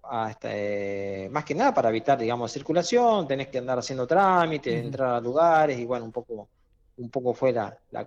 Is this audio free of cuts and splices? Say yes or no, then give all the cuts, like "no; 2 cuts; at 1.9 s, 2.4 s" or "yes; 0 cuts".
yes; 0 cuts